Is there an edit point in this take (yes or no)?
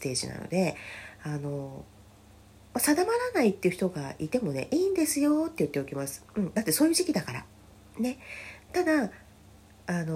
no